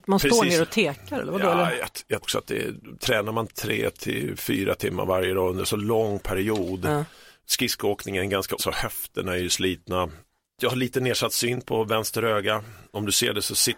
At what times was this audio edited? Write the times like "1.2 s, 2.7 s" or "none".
2.2 s, 8.6 s